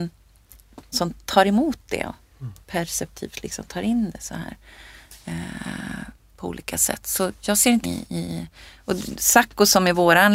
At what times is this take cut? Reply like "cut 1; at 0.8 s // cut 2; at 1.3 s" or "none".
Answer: cut 1; at 0.9 s // cut 2; at 2.6 s // cut 3; at 7.8 s